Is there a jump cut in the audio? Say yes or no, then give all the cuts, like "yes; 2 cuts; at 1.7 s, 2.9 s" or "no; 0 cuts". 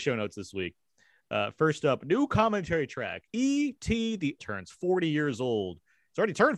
yes; 2 cuts; at 3.3 s, 4.4 s